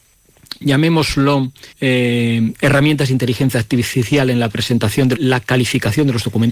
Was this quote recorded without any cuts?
no; 2 cuts; at 1.7 s, 5.2 s

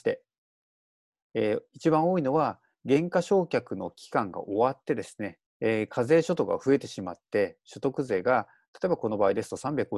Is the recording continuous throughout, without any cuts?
no; 1 cut; at 5.5 s

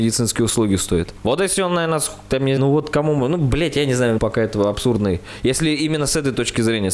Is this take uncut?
no; 2 cuts; at 2.6 s, 4.2 s

